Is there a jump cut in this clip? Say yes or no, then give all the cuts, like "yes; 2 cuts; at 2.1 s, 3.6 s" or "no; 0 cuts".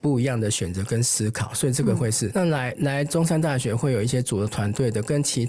yes; 1 cut; at 2.3 s